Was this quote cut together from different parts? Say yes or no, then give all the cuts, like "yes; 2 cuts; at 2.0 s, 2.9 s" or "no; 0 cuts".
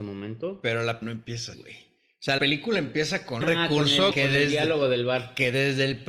yes; 5 cuts; at 1.0 s, 1.5 s, 2.4 s, 3.4 s, 4.1 s